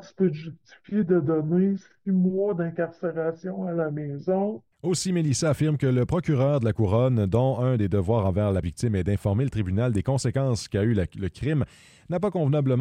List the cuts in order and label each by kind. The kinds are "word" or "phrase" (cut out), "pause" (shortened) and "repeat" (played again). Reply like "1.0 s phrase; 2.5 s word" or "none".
4.7 s pause; 8.6 s word